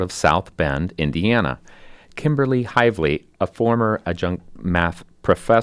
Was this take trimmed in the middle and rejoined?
no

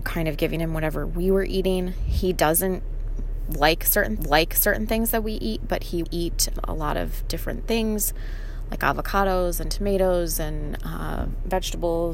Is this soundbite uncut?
no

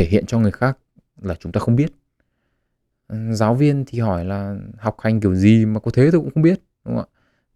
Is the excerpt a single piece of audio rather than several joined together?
yes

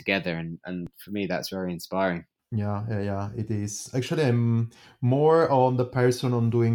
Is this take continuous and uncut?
yes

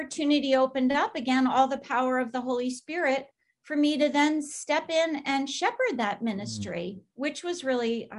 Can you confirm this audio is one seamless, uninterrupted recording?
yes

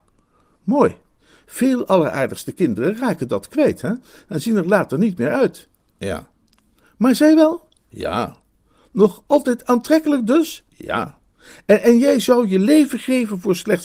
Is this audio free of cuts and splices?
yes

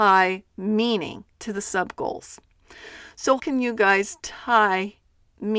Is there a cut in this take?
yes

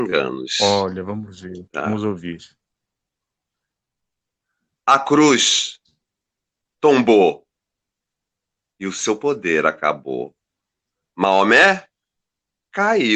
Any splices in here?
no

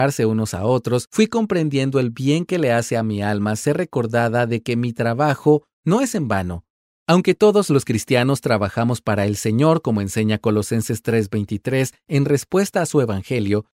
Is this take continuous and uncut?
yes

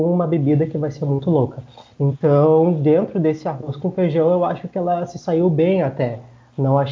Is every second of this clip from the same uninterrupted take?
yes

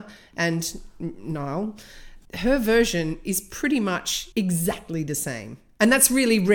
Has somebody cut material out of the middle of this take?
yes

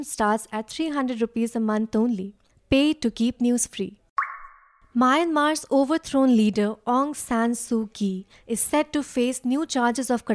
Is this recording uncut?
yes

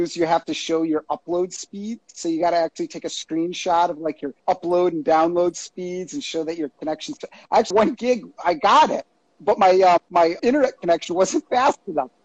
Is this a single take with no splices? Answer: no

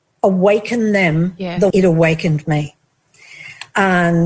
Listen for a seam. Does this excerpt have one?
yes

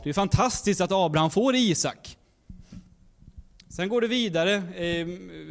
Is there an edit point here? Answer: no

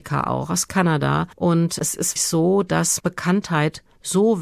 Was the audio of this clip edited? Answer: yes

